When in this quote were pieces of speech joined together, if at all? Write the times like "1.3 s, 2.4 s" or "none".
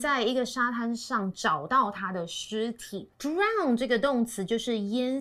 3.1 s

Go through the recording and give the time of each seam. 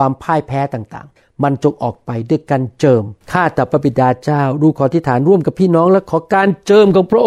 1.2 s, 3.2 s

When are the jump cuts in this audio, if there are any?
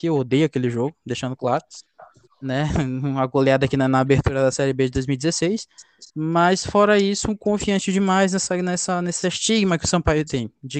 2.3 s, 6.1 s

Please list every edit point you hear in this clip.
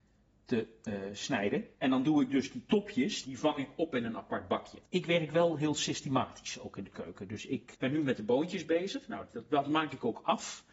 1.7 s, 3.2 s, 4.9 s, 7.7 s

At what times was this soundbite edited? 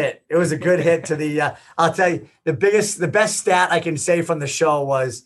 none

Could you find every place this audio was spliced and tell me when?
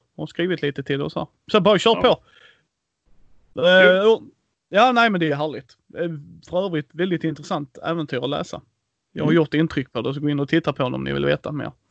none

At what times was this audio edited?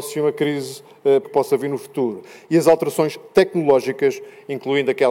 1.2 s

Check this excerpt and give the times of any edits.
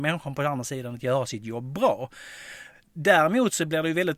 none

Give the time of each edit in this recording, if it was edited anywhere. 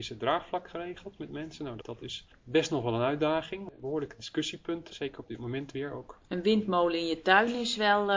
1.8 s, 4.9 s

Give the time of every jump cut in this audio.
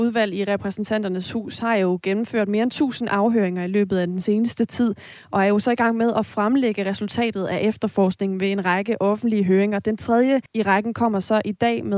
10.5 s

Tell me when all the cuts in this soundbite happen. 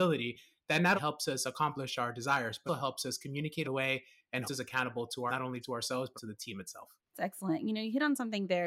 1.0 s, 2.7 s, 3.6 s, 4.5 s, 5.3 s, 5.6 s, 6.2 s, 7.1 s

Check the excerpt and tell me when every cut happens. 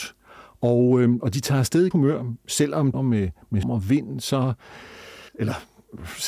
1.9 s, 2.9 s, 3.6 s, 5.3 s

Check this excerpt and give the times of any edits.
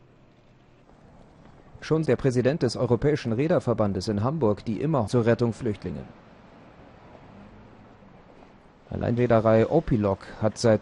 2.0 s, 5.1 s, 5.5 s, 9.2 s

